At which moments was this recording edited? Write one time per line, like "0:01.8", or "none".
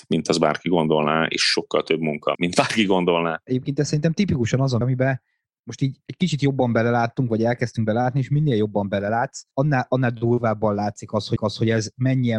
0:02.3
0:04.8
0:11.4